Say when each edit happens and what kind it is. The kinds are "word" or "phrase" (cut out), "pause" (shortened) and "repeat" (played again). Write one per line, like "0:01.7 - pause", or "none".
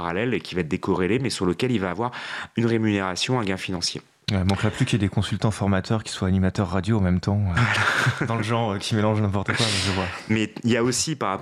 none